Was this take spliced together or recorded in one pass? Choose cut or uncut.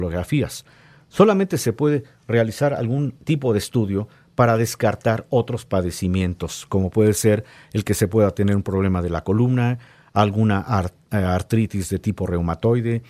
uncut